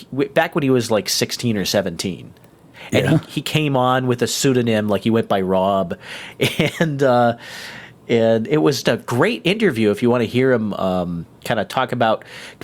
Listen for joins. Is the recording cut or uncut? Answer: cut